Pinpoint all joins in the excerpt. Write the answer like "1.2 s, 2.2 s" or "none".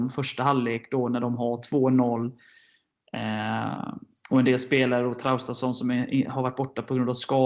none